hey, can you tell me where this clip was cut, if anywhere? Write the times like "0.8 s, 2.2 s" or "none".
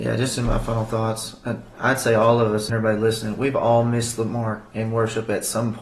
2.7 s